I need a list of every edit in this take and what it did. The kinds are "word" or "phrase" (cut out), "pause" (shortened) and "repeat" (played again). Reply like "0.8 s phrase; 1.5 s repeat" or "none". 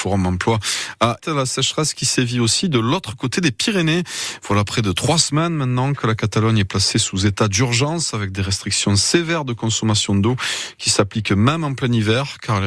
1.2 s word